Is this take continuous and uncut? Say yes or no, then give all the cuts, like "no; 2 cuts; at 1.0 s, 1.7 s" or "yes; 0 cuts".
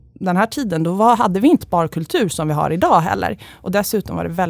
no; 1 cut; at 1.6 s